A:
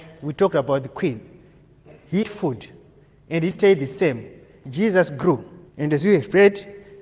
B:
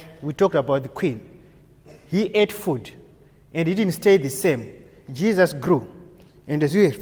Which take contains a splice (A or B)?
A